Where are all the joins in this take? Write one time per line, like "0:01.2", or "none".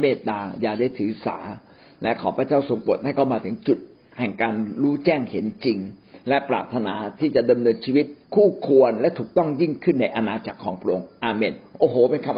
0:08.2